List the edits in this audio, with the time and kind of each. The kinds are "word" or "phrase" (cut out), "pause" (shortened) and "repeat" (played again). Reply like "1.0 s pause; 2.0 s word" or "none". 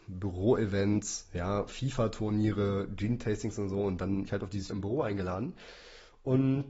4.3 s word; 4.7 s word